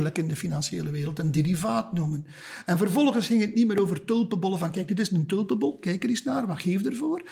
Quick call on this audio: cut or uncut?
uncut